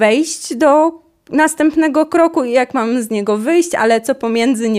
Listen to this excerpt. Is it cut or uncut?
uncut